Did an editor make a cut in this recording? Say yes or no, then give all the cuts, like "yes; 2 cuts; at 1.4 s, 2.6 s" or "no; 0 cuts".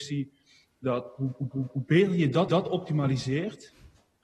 yes; 2 cuts; at 1.5 s, 2.5 s